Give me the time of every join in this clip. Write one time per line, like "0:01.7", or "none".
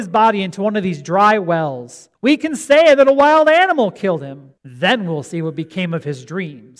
0:02.1
0:04.6